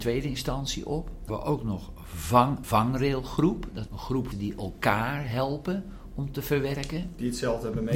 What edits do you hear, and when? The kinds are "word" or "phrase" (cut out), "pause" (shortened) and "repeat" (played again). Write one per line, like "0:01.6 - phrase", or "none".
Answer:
0:01.3 - word
0:02.6 - word
0:03.9 - phrase
0:04.3 - phrase